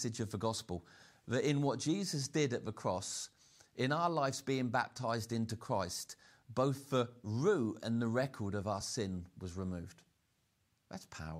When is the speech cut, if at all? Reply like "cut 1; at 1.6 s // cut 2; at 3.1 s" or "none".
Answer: none